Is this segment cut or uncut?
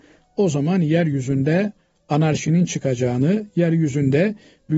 uncut